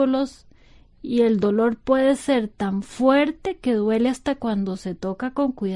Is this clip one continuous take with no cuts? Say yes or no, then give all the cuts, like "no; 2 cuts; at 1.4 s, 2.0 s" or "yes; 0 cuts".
yes; 0 cuts